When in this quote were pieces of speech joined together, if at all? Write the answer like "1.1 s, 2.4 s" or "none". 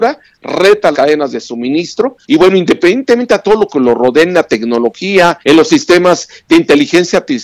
0.9 s, 2.2 s, 5.4 s